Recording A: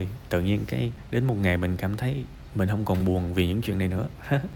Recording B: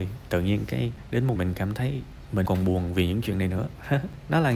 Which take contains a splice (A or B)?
B